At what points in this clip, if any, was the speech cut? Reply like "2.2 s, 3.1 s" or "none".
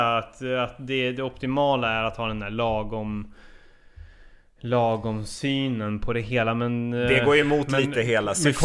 none